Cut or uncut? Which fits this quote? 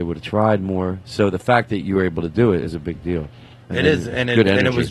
uncut